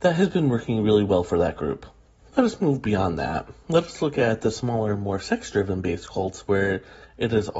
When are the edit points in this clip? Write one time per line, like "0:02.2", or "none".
none